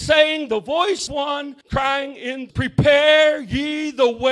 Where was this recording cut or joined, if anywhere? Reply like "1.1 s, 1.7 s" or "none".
1.1 s, 1.6 s, 2.5 s